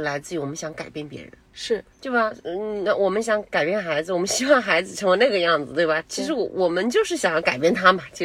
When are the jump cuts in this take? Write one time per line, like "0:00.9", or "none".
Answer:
0:01.9

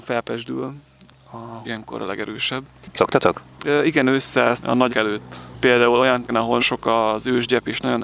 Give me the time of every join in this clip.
0:01.6
0:03.0
0:04.6
0:04.9
0:06.3
0:06.6

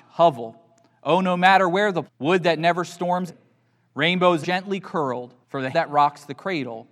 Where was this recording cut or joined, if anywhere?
0:02.1
0:03.3
0:04.4
0:05.4
0:05.7

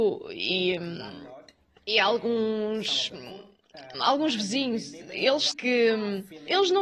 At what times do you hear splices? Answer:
0:03.9
0:05.5

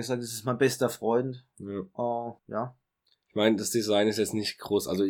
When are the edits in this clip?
0:02.4

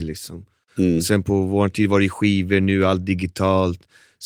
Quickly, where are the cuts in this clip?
none

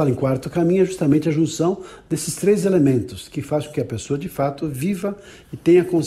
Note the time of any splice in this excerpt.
none

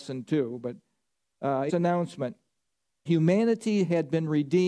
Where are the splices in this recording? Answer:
0:01.7
0:03.1

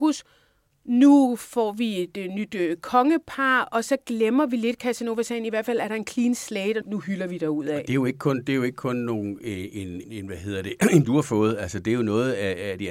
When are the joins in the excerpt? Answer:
0:06.8
0:10.0
0:11.0

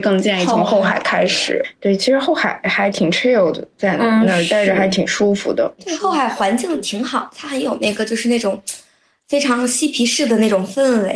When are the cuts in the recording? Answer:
none

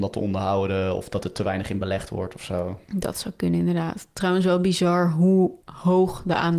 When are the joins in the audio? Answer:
0:02.8
0:05.6

